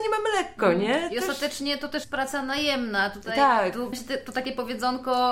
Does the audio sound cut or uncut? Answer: cut